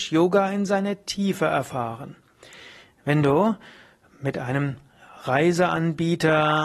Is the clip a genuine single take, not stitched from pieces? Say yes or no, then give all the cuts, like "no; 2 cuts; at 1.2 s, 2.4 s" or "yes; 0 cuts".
yes; 0 cuts